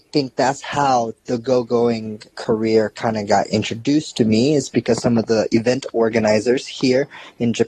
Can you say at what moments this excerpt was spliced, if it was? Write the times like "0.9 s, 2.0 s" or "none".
2.3 s